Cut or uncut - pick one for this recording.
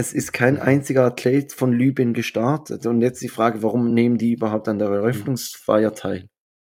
uncut